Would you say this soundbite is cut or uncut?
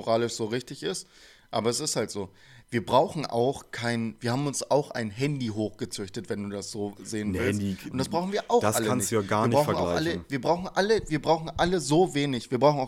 uncut